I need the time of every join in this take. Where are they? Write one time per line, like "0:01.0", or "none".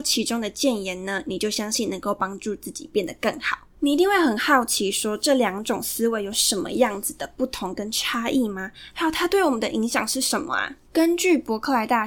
0:03.7
0:10.9